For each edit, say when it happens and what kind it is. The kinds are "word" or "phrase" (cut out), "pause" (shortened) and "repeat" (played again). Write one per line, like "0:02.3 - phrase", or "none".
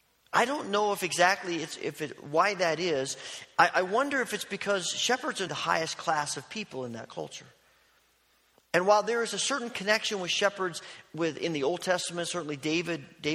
0:05.5 - phrase